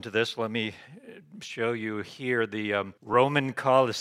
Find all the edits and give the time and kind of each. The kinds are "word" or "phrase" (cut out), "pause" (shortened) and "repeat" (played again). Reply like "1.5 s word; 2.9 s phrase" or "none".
3.0 s pause